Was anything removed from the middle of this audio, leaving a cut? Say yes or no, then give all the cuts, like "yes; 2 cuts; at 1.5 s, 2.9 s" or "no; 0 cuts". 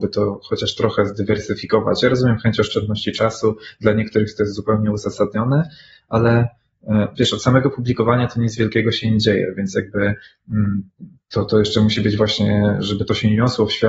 no; 0 cuts